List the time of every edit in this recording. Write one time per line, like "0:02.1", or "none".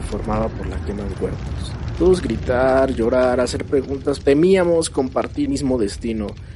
0:01.1
0:02.2
0:04.2
0:05.5

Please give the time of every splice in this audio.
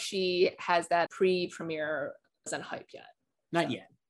0:01.1
0:02.5

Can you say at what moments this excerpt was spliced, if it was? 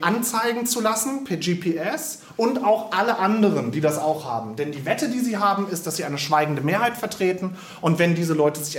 none

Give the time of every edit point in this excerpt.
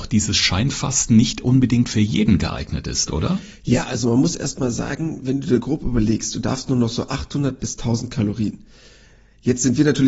none

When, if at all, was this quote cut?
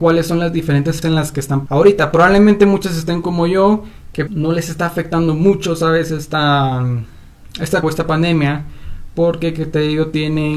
0:01.0
0:01.7
0:04.3
0:07.8

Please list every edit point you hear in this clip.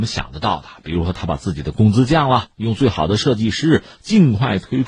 0:02.5

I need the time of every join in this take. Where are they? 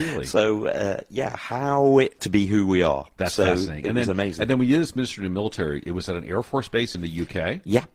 0:02.2
0:06.9

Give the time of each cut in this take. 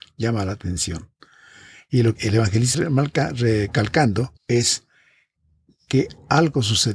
0:02.2
0:02.7
0:04.4

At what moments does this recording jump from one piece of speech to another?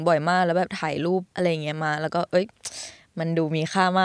0:01.3

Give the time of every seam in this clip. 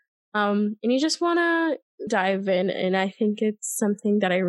0:02.1

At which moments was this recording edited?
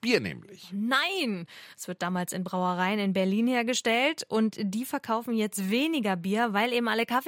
none

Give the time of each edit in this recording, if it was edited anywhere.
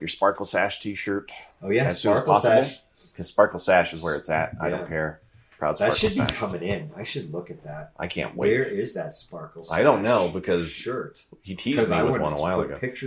0:01.5

